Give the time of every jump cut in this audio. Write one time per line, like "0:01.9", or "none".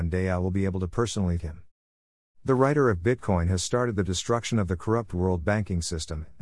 0:01.4